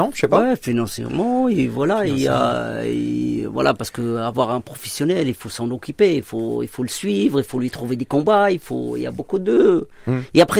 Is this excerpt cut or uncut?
uncut